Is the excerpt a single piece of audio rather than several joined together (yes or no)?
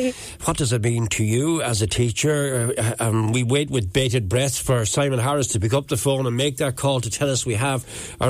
yes